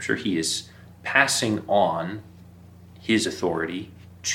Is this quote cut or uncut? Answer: uncut